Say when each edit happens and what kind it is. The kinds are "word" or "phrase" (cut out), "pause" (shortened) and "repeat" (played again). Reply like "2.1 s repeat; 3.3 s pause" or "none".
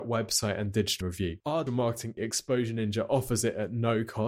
1.0 s word; 1.7 s word; 2.2 s word